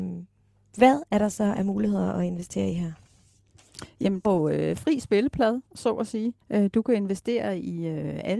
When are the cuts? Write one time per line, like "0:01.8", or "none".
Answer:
0:04.2
0:05.7
0:06.4